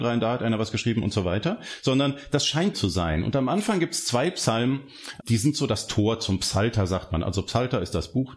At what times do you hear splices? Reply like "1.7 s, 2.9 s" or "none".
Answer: 2.7 s, 5.2 s